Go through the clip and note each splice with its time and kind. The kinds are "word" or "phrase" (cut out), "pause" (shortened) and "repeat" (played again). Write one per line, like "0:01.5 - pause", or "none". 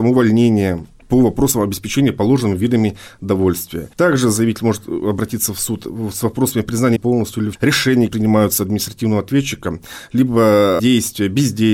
0:03.9 - pause
0:07.0 - word
0:07.5 - word
0:08.1 - word
0:10.8 - word